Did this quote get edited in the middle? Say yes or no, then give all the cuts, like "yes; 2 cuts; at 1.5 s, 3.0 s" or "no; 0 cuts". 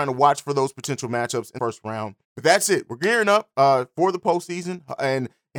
yes; 2 cuts; at 1.6 s, 2.2 s